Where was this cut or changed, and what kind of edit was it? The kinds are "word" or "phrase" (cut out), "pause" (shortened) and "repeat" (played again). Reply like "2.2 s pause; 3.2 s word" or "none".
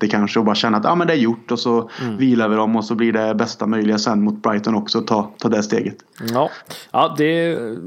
none